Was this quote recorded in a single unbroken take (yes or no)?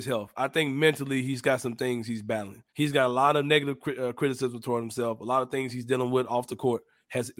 no